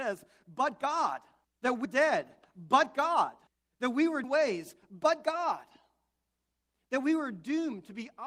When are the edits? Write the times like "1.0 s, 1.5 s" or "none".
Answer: 1.4 s, 1.8 s, 3.5 s, 4.2 s